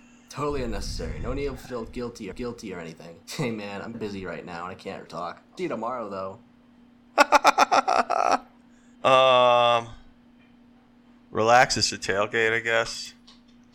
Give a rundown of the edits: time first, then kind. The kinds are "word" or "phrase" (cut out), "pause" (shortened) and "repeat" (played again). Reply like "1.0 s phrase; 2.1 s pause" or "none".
2.3 s repeat; 3.2 s pause; 3.9 s word; 5.1 s word; 5.6 s word; 8.9 s pause; 11.9 s word